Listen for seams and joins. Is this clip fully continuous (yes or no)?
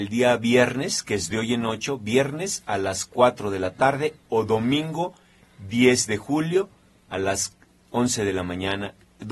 yes